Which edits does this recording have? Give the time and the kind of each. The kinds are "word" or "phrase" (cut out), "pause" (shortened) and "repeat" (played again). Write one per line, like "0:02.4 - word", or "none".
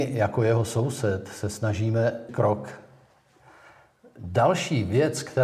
0:02.3 - word